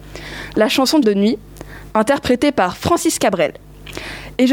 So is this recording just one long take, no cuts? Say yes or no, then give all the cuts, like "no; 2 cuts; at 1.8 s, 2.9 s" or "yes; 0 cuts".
no; 1 cut; at 1.0 s